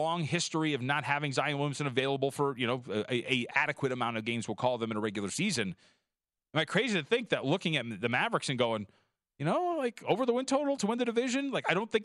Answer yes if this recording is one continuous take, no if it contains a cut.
yes